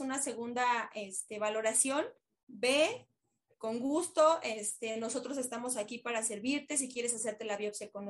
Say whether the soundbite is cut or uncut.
uncut